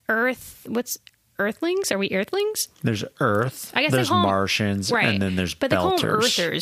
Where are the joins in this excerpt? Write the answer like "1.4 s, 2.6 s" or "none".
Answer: none